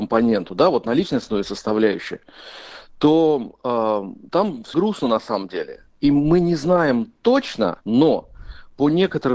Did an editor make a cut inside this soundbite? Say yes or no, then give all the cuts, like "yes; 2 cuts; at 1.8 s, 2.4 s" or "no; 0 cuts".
yes; 2 cuts; at 4.7 s, 7.8 s